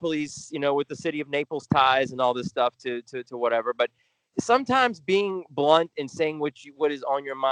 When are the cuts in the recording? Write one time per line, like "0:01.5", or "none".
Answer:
none